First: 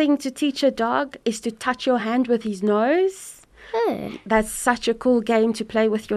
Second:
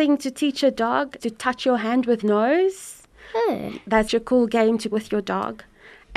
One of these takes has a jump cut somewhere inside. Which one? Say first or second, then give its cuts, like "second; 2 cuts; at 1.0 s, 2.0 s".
second; 4 cuts; at 1.2 s, 2.2 s, 4.1 s, 4.9 s